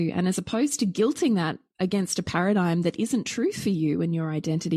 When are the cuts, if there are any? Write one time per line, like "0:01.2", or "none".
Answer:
none